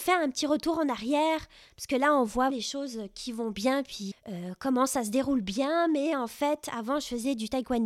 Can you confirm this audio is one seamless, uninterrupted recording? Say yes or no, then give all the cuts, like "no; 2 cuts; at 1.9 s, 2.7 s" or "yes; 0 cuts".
no; 2 cuts; at 2.5 s, 4.1 s